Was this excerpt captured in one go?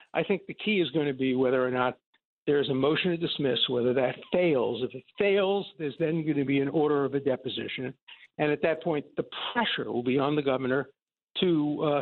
yes; 0 cuts

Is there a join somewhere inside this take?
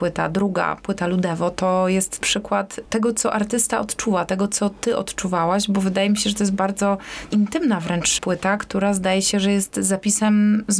no; 0 cuts

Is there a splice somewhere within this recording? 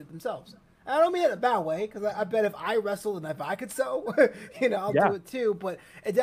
no; 0 cuts

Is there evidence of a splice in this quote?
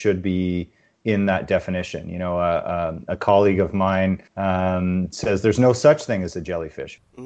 yes; 1 cut; at 4.3 s

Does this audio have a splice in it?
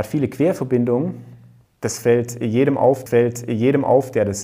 yes; 2 cuts; at 1.6 s, 3.1 s

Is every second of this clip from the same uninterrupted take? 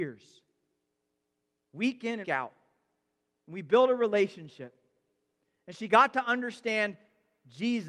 no; 1 cut; at 2.2 s

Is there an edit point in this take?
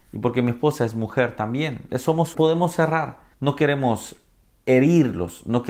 yes; 3 cuts; at 1.9 s, 2.3 s, 3.3 s

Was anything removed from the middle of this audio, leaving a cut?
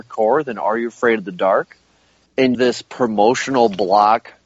yes; 1 cut; at 2.5 s

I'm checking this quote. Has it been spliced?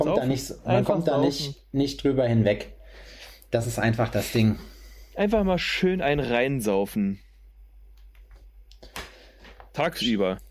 no; 0 cuts

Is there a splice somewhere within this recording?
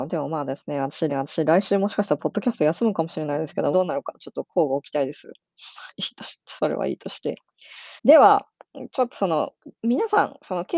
yes; 4 cuts; at 1.1 s, 3.7 s, 8.0 s, 9.7 s

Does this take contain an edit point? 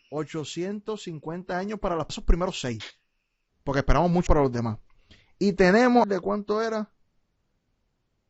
yes; 3 cuts; at 2.1 s, 4.3 s, 6.0 s

